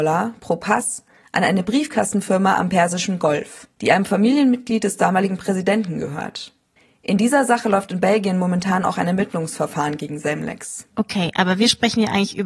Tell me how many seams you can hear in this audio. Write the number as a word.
one